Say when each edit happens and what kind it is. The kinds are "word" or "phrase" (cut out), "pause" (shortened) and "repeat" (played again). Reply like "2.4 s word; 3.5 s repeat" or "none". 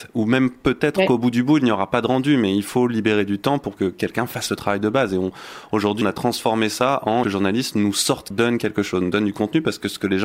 6.0 s word; 7.2 s phrase; 8.3 s phrase